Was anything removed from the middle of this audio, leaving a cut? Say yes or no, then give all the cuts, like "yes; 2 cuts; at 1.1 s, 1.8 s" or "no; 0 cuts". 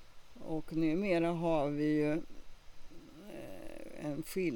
no; 0 cuts